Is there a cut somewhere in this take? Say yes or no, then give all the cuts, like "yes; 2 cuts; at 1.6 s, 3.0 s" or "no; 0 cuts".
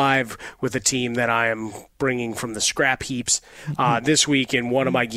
no; 0 cuts